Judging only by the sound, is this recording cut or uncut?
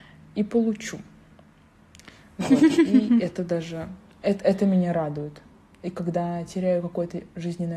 uncut